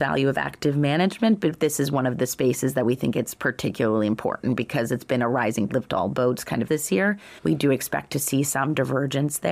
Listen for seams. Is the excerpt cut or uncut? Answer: cut